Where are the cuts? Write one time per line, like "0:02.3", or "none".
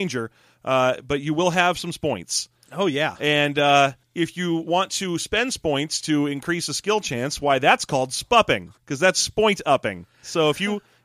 0:04.0
0:08.8